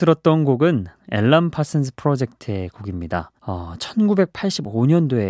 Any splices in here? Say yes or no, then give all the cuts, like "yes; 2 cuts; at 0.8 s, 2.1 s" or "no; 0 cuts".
yes; 1 cut; at 3.4 s